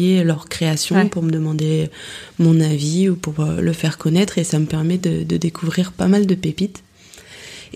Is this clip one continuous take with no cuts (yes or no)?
yes